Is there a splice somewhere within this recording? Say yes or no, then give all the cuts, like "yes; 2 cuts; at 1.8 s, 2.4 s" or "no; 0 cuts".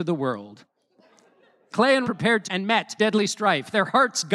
yes; 3 cuts; at 2.0 s, 2.4 s, 3.0 s